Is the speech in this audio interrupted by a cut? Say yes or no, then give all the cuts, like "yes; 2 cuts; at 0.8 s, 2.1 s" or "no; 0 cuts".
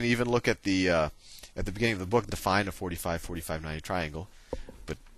yes; 1 cut; at 2.3 s